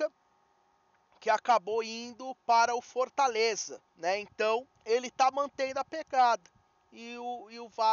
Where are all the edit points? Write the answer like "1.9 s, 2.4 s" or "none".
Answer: 3.9 s, 4.7 s